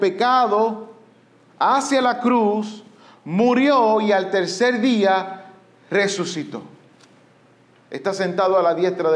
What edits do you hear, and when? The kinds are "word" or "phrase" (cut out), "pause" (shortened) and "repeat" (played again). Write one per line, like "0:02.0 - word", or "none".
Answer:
none